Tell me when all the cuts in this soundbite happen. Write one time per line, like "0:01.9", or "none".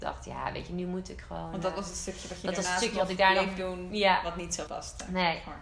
0:04.7